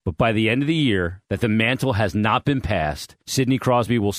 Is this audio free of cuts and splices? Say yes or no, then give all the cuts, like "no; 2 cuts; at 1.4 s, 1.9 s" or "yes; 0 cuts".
no; 2 cuts; at 1.2 s, 3.2 s